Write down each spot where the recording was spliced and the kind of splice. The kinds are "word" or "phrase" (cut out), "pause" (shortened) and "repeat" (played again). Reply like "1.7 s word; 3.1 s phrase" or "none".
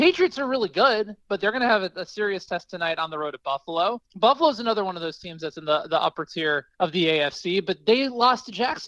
4.0 s pause; 6.7 s pause